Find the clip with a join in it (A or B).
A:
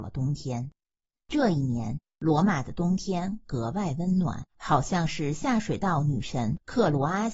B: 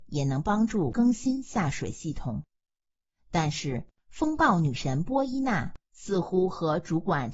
A